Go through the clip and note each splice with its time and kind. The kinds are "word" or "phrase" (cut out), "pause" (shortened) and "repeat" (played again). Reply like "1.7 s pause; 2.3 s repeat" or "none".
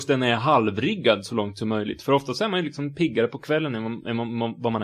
none